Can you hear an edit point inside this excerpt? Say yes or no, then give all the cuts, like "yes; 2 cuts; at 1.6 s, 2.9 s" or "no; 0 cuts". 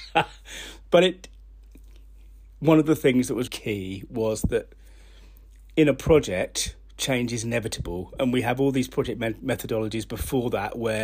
yes; 1 cut; at 3.5 s